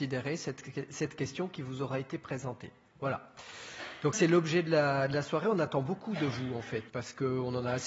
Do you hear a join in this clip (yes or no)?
yes